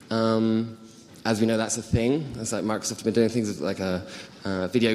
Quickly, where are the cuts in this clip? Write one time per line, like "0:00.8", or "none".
none